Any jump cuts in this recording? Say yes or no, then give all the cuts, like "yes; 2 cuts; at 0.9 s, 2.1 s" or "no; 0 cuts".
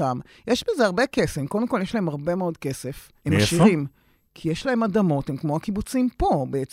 yes; 1 cut; at 3.2 s